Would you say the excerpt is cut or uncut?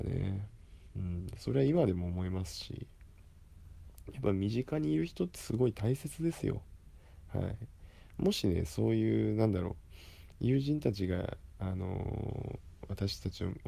uncut